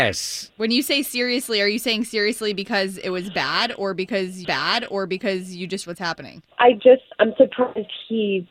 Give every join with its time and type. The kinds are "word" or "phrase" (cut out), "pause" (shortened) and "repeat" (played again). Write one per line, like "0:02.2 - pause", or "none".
0:04.4 - repeat
0:05.8 - word
0:06.5 - pause
0:07.1 - pause